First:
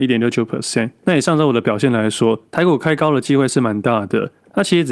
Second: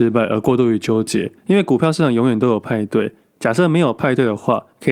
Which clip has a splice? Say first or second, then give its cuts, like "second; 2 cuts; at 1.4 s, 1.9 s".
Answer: first; 1 cut; at 2.5 s